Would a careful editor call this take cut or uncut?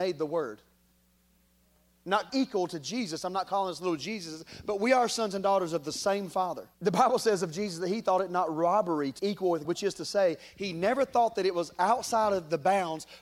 cut